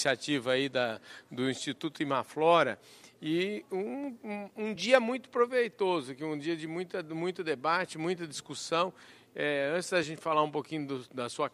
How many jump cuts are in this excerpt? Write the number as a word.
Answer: zero